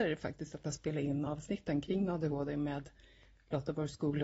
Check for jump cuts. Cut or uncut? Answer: uncut